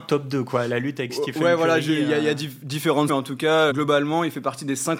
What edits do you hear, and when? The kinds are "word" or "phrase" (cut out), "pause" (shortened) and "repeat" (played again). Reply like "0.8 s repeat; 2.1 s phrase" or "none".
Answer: 3.1 s phrase; 3.7 s word

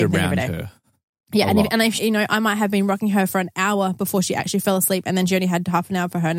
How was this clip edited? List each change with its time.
2.0 s word

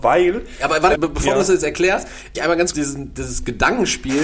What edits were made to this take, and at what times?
0.9 s word; 2.3 s word; 2.7 s word

